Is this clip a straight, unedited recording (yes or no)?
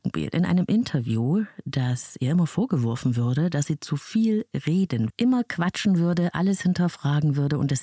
no